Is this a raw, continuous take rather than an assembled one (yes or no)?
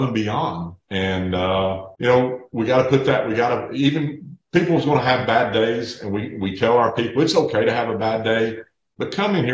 yes